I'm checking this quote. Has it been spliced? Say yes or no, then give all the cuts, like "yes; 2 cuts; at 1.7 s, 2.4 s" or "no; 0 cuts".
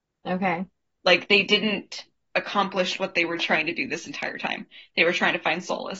no; 0 cuts